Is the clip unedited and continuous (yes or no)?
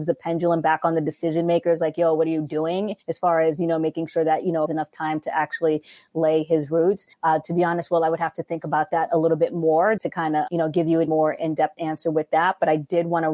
no